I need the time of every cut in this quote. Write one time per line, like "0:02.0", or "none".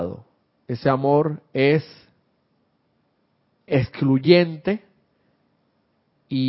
0:03.7